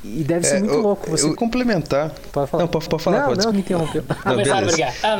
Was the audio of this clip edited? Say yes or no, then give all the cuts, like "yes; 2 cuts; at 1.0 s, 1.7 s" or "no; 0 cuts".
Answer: yes; 4 cuts; at 1.3 s, 2.9 s, 3.5 s, 4.2 s